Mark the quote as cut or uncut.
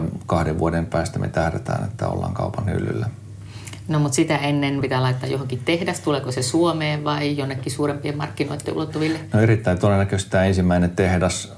cut